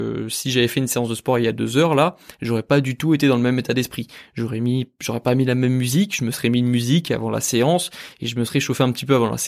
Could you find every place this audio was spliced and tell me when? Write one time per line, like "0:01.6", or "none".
none